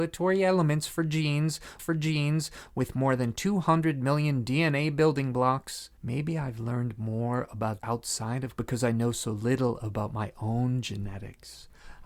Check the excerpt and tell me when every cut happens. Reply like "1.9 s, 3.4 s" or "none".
1.8 s, 6.0 s, 7.8 s, 8.6 s